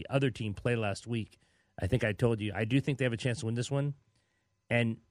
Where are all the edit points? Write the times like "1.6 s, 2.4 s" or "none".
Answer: none